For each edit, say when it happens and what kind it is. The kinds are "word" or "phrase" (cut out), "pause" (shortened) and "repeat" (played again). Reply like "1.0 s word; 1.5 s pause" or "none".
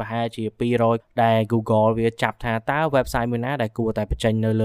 1.0 s word